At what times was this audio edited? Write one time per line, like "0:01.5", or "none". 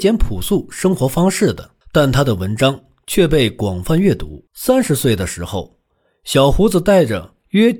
0:01.8
0:04.5